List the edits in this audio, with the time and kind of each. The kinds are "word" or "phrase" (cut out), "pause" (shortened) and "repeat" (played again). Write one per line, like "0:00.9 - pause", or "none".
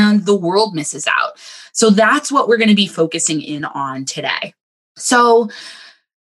none